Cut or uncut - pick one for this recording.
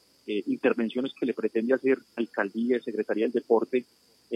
cut